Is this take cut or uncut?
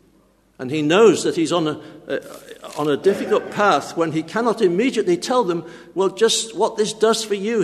uncut